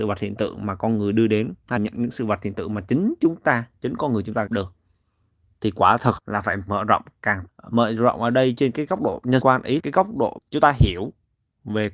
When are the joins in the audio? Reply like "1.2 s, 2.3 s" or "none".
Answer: 1.8 s, 4.5 s, 6.2 s, 6.7 s, 7.5 s, 9.4 s, 9.8 s, 10.4 s